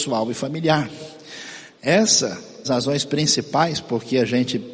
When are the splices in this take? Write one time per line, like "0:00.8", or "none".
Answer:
0:02.6